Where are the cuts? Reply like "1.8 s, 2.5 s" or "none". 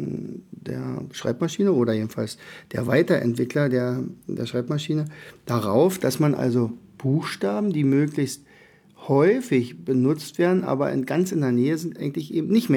none